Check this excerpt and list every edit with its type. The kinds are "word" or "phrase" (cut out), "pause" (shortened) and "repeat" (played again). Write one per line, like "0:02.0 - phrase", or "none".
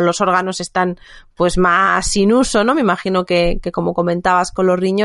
none